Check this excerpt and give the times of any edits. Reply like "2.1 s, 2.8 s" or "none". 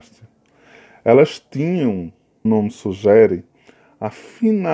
2.5 s